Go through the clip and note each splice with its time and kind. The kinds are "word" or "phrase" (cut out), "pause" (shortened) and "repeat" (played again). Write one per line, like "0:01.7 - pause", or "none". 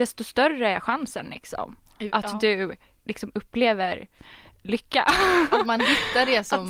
none